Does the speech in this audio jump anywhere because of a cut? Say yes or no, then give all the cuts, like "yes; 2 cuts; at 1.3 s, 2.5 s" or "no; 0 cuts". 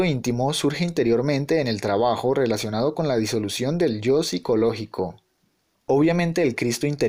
no; 0 cuts